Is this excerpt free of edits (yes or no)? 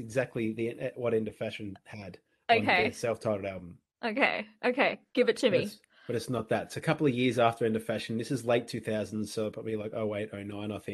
yes